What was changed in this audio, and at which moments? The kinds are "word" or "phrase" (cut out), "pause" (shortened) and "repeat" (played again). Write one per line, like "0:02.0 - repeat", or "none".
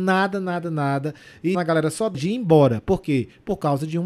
0:01.5 - word
0:02.1 - word